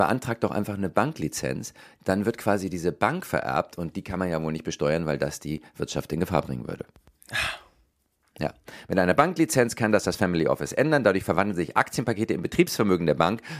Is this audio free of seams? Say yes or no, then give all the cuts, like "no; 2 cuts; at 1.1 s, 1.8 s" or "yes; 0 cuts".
yes; 0 cuts